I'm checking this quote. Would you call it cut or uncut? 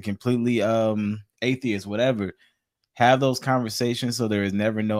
uncut